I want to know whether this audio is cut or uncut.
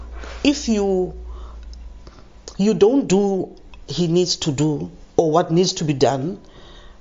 cut